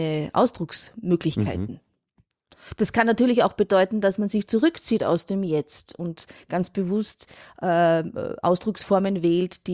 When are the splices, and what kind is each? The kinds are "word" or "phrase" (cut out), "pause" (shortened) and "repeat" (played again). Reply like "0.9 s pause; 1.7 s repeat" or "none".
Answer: none